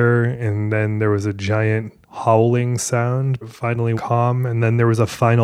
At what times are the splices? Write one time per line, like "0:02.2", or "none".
0:03.4
0:03.9